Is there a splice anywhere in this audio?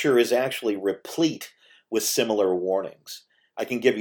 no; 0 cuts

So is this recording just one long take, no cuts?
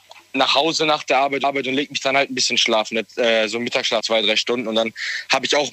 no; 2 cuts; at 1.4 s, 4.0 s

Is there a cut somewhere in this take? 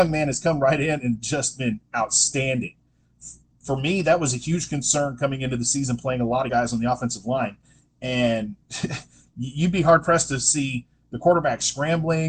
yes; 1 cut; at 6.5 s

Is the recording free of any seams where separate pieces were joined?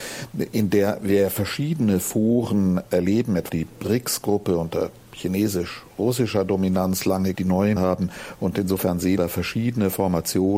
no; 4 cuts; at 3.5 s, 7.3 s, 7.8 s, 9.2 s

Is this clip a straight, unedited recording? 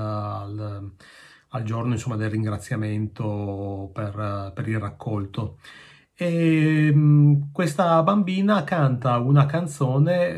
yes; 0 cuts

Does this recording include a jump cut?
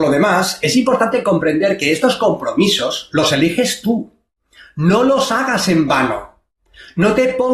no; 0 cuts

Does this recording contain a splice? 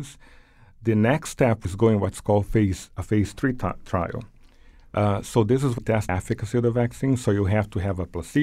yes; 3 cuts; at 1.6 s, 5.8 s, 6.1 s

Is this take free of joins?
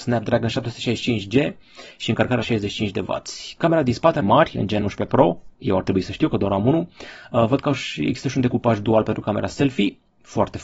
no; 4 cuts; at 2.4 s, 4.2 s, 4.8 s, 5.5 s

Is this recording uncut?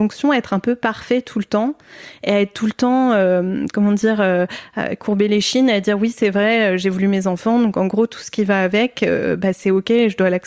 yes; 0 cuts

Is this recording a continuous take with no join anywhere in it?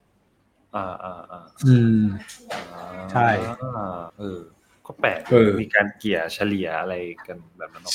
no; 1 cut; at 4.1 s

